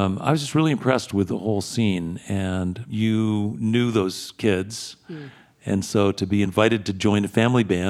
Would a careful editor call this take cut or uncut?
uncut